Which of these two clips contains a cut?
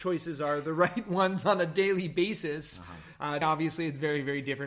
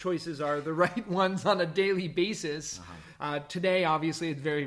first; 1 cut; at 3.4 s

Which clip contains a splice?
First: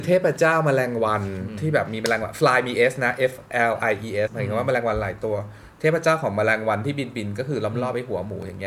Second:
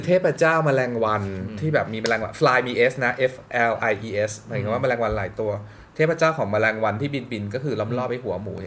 first; 1 cut; at 4.3 s

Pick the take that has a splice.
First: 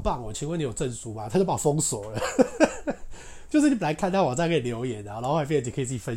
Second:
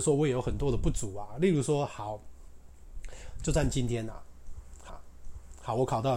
second; 1 cut; at 4.9 s

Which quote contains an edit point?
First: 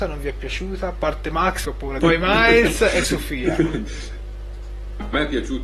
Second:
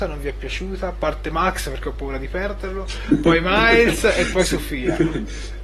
first; 3 cuts; at 1.6 s, 2.0 s, 3.0 s

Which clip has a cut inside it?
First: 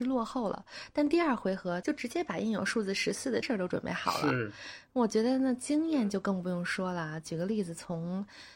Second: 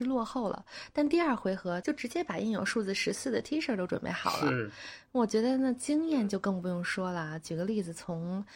first; 1 cut; at 3.4 s

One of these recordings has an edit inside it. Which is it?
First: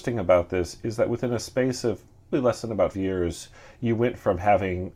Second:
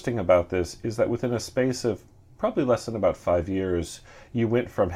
first; 2 cuts; at 2.3 s, 2.9 s

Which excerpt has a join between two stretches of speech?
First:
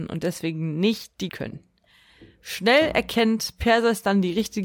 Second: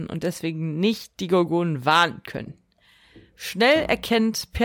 first; 1 cut; at 1.3 s

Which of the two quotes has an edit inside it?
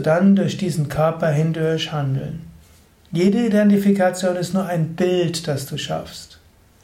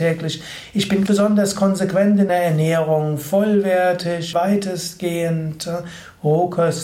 second; 3 cuts; at 1.1 s, 2.3 s, 4.3 s

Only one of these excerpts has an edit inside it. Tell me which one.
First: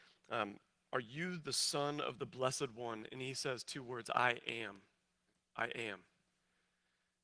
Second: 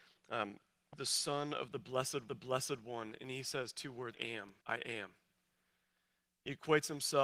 second; 4 cuts; at 0.9 s, 2.3 s, 4.1 s, 4.6 s

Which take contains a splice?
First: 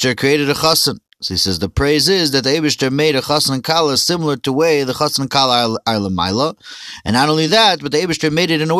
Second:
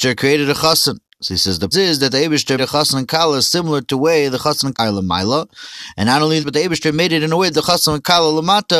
second; 4 cuts; at 1.7 s, 2.6 s, 4.7 s, 6.4 s

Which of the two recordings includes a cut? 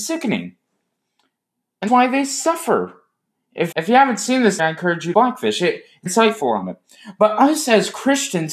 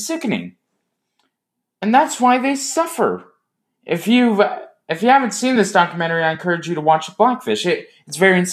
first; 5 cuts; at 1.9 s, 3.7 s, 4.6 s, 5.1 s, 6.1 s

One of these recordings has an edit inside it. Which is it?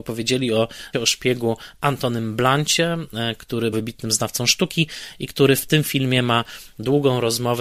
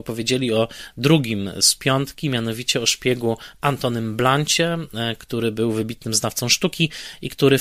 first; 2 cuts; at 0.9 s, 3.7 s

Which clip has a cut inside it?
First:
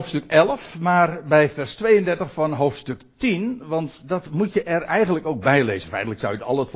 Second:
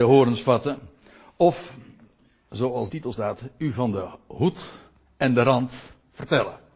second; 1 cut; at 2.9 s

